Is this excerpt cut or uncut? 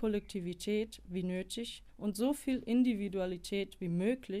cut